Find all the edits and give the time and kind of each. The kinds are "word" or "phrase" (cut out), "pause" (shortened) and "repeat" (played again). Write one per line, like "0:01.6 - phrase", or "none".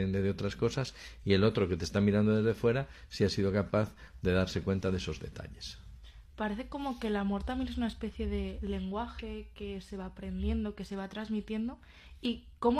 none